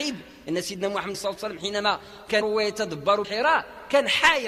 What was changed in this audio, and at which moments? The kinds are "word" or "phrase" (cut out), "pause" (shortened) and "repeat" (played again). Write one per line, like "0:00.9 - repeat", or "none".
0:01.1 - word
0:02.4 - word
0:03.2 - word